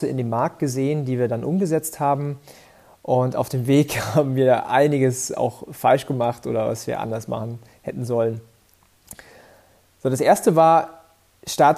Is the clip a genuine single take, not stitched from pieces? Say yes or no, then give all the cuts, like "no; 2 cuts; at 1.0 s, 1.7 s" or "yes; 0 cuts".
yes; 0 cuts